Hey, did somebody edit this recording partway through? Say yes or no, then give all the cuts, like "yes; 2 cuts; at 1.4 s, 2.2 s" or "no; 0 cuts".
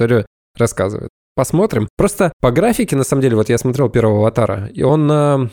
no; 0 cuts